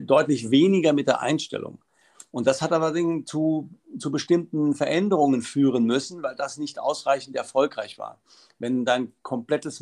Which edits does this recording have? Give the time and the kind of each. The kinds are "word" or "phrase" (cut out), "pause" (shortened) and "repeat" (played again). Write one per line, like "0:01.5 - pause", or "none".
none